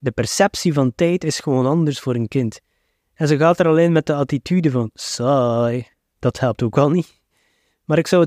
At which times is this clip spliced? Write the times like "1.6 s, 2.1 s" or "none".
none